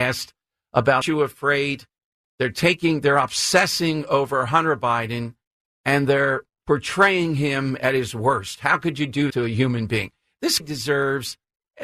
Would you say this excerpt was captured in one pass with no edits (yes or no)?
no